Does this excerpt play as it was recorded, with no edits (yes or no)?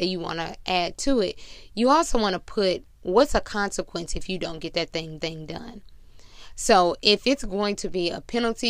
no